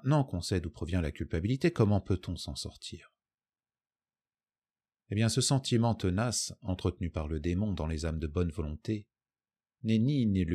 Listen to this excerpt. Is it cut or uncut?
uncut